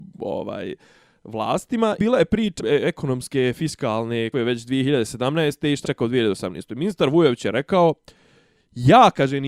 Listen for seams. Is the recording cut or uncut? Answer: cut